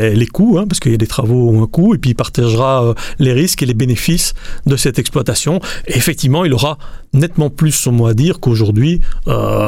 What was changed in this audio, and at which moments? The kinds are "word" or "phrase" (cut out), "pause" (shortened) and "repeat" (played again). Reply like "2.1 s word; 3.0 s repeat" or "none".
none